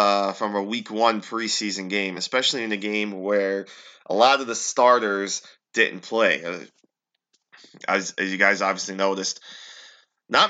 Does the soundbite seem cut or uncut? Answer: uncut